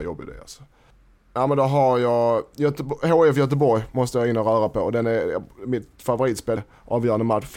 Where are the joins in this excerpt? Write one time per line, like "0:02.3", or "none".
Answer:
0:06.6